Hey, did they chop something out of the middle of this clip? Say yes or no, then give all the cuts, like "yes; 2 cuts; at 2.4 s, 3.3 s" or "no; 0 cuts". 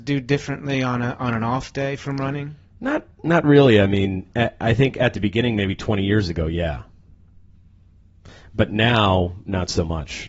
no; 0 cuts